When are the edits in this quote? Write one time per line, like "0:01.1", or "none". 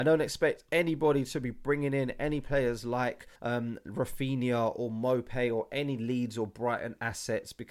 0:03.4

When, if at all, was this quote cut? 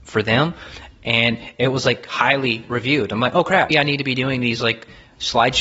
0:03.7

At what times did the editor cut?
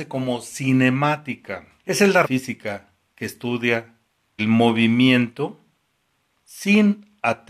0:01.8
0:02.2
0:03.1
0:04.4

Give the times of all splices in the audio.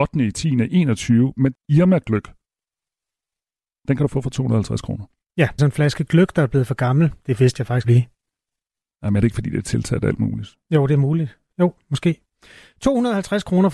0:01.5
0:05.6
0:07.8

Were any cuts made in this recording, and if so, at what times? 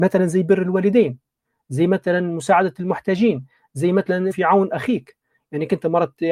0:04.3

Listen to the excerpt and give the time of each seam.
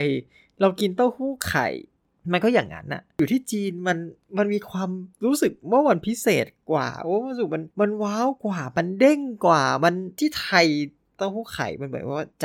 0:05.1
0:07.7

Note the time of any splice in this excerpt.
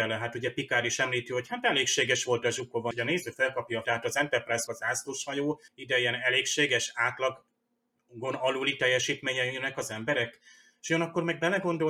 0:02.9
0:03.8
0:04.7
0:05.7

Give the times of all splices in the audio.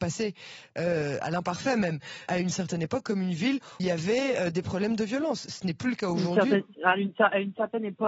0:02.3
0:03.8

